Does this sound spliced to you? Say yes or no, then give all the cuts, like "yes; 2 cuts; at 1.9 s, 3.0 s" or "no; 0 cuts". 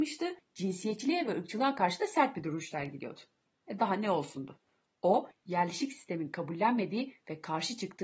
no; 0 cuts